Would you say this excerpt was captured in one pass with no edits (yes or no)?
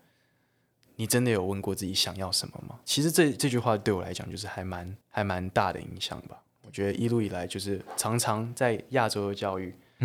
no